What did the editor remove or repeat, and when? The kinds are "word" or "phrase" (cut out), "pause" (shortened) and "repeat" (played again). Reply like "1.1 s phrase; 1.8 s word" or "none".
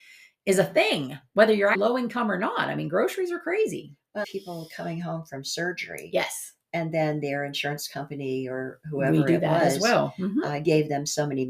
1.7 s word; 4.2 s phrase